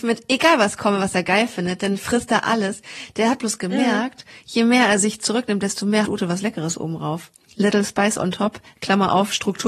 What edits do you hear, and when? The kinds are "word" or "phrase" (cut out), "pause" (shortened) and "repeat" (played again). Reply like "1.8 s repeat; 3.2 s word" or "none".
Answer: 6.0 s word